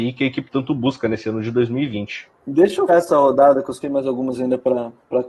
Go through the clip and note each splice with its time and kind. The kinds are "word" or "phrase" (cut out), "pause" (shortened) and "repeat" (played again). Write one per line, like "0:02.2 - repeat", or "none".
0:02.4 - pause
0:02.9 - word
0:03.8 - phrase